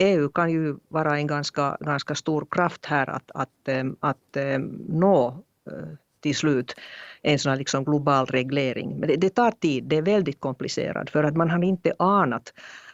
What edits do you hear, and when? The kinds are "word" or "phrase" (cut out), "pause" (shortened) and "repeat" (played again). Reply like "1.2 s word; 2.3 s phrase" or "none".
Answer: none